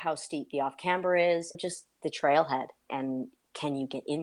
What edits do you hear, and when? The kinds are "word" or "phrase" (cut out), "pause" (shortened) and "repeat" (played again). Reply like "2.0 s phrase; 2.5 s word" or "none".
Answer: 1.5 s phrase; 2.9 s word